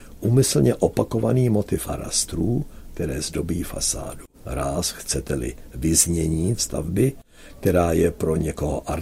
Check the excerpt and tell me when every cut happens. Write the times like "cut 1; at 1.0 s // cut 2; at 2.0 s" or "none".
cut 1; at 1.8 s // cut 2; at 4.3 s // cut 3; at 6.6 s

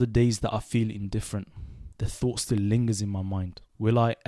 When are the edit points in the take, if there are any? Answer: cut 1; at 1.9 s

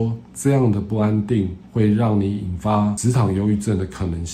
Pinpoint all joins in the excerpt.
cut 1; at 1.7 s

